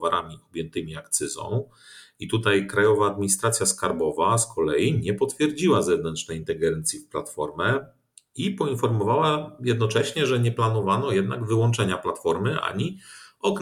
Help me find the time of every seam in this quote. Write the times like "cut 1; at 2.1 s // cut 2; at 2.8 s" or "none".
none